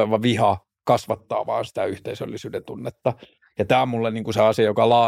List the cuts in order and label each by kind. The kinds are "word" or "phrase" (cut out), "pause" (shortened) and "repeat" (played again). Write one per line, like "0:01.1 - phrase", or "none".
none